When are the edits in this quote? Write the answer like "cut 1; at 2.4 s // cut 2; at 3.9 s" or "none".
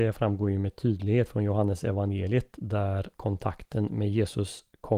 cut 1; at 3.1 s